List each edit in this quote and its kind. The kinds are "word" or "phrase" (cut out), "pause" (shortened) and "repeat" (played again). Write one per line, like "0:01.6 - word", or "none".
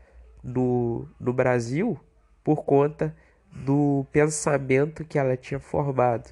none